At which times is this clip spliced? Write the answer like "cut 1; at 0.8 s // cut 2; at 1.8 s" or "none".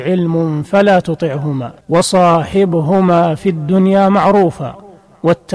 cut 1; at 1.8 s